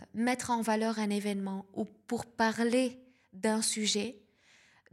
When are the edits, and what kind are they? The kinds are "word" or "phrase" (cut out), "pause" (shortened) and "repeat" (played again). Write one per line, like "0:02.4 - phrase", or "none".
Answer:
none